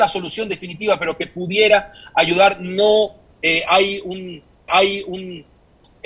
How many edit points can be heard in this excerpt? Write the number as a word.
one